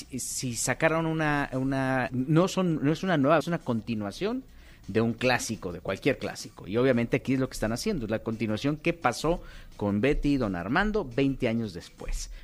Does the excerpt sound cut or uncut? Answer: cut